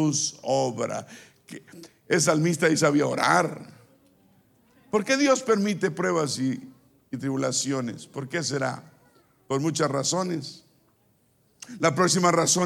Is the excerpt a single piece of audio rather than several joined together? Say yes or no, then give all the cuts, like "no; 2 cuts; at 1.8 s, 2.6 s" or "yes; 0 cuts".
yes; 0 cuts